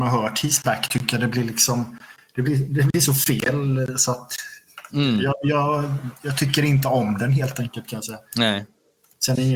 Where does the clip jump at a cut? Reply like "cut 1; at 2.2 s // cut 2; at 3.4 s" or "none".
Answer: cut 1; at 8.3 s